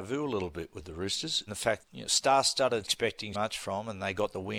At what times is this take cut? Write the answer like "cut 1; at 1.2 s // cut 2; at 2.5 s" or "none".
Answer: cut 1; at 1.5 s // cut 2; at 1.8 s // cut 3; at 2.8 s // cut 4; at 3.3 s